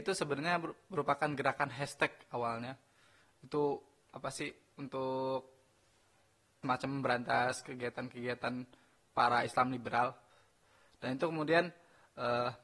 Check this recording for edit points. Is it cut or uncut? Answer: uncut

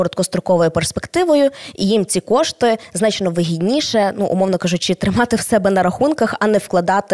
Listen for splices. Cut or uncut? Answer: uncut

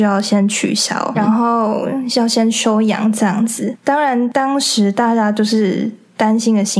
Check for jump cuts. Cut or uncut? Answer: cut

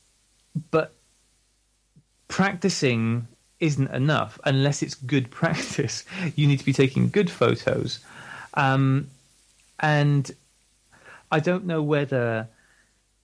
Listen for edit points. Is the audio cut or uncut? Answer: uncut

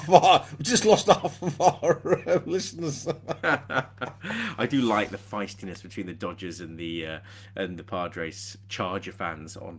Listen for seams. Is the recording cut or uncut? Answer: uncut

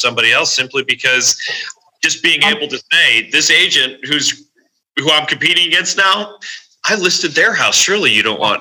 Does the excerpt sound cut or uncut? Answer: uncut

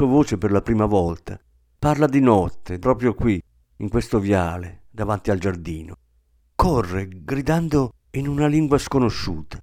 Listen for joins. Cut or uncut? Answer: cut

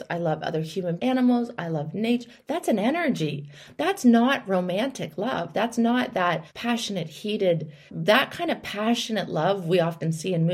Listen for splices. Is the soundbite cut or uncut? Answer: cut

